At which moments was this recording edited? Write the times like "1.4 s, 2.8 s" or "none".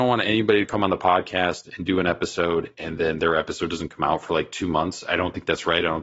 none